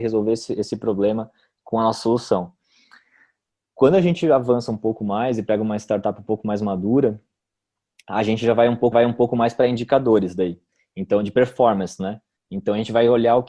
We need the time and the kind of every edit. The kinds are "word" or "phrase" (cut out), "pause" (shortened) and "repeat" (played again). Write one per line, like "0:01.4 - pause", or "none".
0:08.9 - repeat